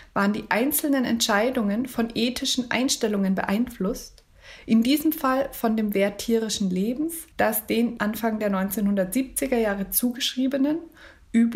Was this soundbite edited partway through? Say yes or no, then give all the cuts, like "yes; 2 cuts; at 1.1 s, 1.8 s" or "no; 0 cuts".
yes; 2 cuts; at 7.3 s, 8.0 s